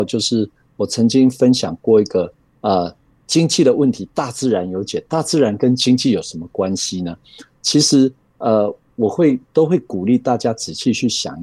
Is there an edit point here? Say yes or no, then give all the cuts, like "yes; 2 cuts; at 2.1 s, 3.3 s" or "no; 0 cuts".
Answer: no; 0 cuts